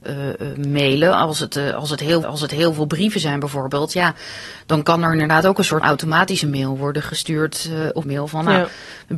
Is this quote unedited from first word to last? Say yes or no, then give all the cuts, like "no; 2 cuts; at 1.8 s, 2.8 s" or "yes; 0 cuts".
no; 3 cuts; at 2.2 s, 5.8 s, 8.0 s